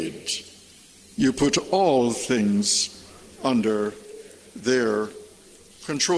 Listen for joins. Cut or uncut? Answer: uncut